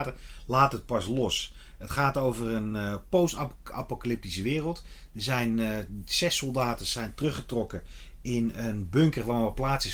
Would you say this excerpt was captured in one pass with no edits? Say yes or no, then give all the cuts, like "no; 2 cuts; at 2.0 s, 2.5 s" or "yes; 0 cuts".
yes; 0 cuts